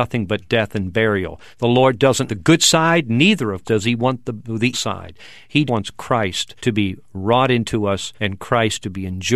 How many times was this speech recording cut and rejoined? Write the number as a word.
six